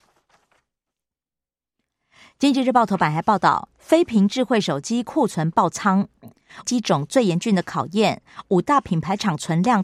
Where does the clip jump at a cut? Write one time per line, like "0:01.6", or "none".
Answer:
0:06.6